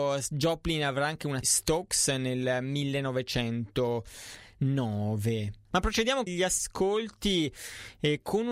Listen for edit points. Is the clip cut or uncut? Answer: cut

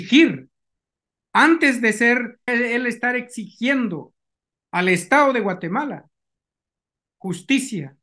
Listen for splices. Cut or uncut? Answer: cut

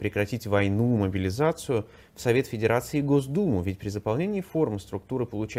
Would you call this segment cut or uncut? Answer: uncut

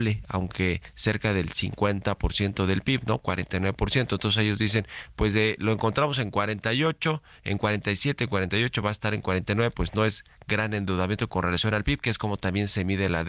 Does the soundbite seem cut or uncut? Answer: uncut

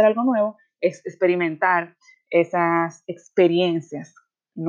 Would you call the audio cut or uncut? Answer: uncut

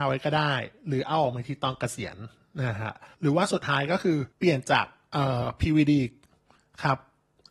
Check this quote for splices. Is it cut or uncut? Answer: cut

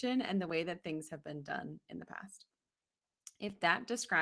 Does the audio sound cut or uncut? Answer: uncut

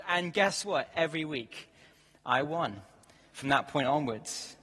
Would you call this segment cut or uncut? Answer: uncut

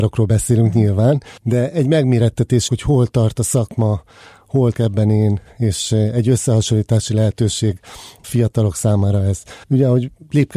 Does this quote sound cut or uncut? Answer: cut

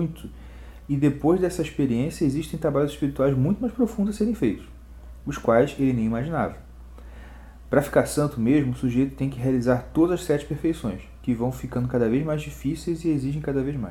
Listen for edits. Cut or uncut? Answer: uncut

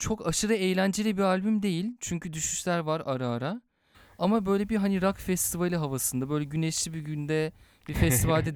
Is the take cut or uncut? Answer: uncut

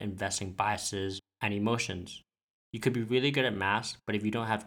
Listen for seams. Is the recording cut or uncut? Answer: uncut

